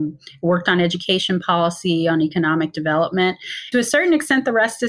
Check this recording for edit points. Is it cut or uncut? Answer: cut